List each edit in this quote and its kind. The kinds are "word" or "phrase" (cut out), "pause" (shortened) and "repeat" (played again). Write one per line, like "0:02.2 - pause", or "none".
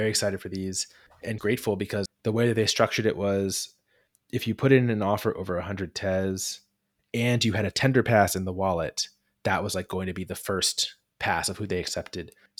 0:01.4 - word
0:02.1 - word